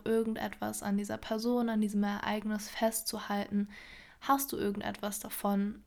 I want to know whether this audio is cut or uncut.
uncut